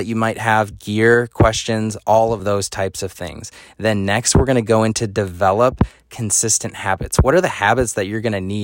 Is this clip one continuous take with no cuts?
yes; 0 cuts

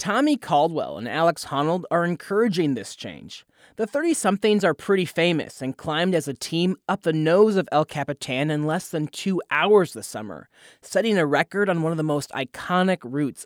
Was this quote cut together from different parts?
no; 0 cuts

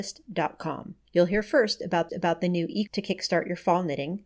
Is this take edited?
yes; 3 cuts; at 1.0 s, 2.1 s, 2.9 s

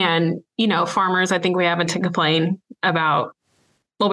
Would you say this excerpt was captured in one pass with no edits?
no; 1 cut; at 1.9 s

